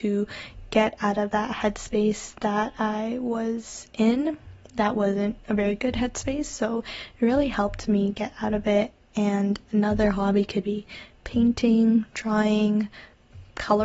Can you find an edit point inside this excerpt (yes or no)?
no